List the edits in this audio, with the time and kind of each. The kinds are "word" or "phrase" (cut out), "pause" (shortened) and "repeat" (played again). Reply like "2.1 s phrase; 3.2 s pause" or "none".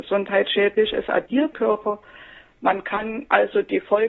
1.5 s phrase